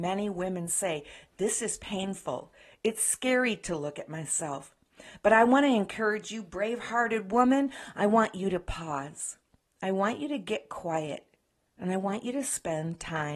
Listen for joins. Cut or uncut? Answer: uncut